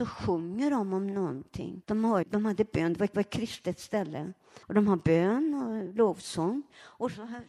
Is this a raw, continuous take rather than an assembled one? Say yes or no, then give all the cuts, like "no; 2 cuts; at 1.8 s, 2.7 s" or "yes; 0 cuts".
no; 4 cuts; at 1.8 s, 2.2 s, 3.1 s, 4.6 s